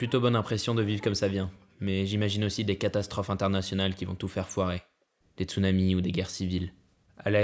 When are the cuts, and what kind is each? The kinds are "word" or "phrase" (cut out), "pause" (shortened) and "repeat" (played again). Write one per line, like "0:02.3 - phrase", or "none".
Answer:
none

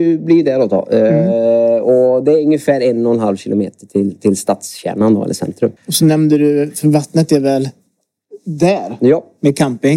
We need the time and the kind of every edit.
0:05.8 - pause

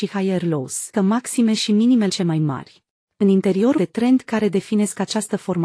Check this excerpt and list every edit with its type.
0:00.9 - word
0:02.1 - phrase
0:03.0 - pause
0:03.8 - word

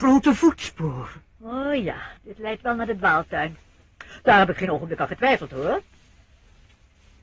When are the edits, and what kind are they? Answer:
0:02.2 - pause

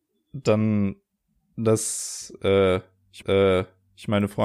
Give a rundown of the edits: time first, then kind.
0:03.2 - repeat

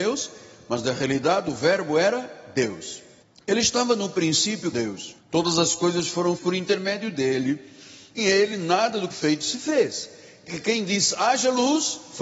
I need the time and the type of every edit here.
0:03.2 - pause
0:04.7 - word
0:05.2 - pause
0:06.4 - word
0:08.2 - word
0:09.1 - word
0:10.5 - word

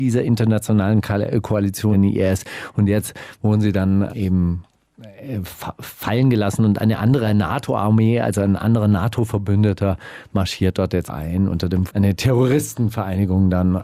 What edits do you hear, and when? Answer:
0:01.9 - word
0:04.1 - word
0:11.1 - word
0:11.9 - word

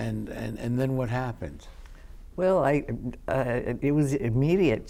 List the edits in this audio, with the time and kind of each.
0:03.8 - word

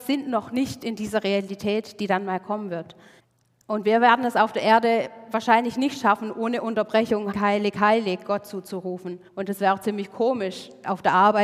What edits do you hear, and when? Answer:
0:03.2 - pause
0:07.3 - word
0:09.3 - pause

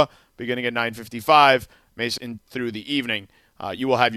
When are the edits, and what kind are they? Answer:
0:02.2 - phrase

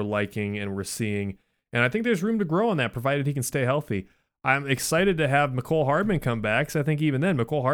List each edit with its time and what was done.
none

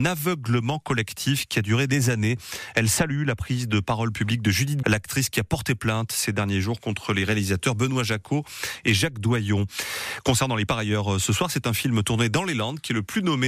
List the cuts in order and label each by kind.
0:04.8 - word
0:10.7 - word

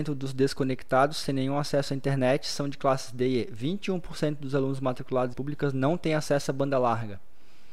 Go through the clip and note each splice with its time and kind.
0:05.3 - phrase

